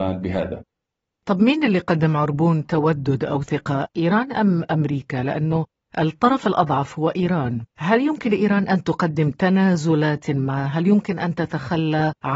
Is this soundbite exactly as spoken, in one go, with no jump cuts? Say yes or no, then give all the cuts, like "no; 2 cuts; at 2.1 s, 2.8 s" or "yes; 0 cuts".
no; 1 cut; at 7.7 s